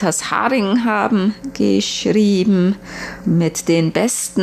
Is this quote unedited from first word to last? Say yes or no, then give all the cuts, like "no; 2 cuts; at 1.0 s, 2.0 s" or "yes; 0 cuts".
no; 1 cut; at 3.2 s